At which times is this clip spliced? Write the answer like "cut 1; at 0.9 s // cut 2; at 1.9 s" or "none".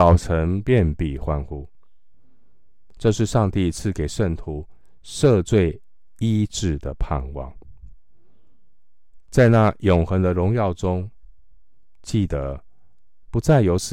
none